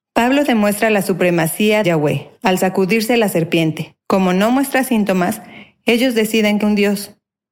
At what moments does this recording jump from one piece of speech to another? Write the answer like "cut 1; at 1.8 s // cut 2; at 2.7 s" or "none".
cut 1; at 1.8 s // cut 2; at 4.0 s // cut 3; at 6.6 s